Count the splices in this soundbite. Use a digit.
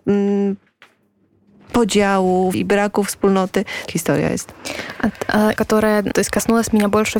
4